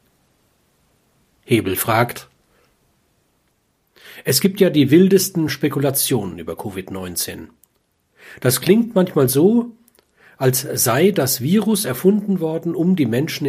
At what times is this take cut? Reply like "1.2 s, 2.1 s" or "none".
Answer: none

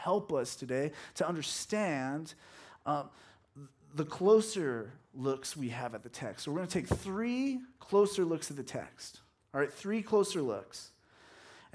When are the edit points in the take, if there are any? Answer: none

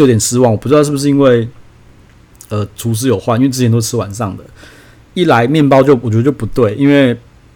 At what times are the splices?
none

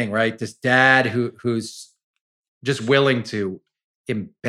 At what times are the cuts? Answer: none

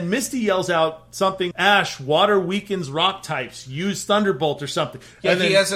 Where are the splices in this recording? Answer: 1.5 s

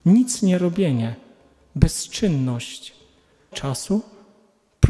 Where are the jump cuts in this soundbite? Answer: 3.5 s

